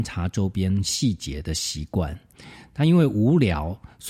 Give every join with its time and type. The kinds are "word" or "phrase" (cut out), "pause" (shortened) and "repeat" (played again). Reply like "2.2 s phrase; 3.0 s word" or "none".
none